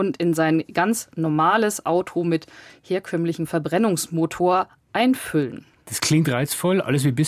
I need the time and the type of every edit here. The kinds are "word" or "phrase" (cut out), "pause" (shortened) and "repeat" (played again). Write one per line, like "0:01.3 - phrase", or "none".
none